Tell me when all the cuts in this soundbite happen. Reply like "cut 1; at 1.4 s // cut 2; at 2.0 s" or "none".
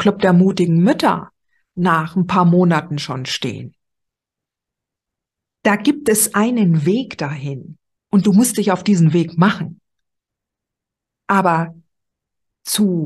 cut 1; at 8.0 s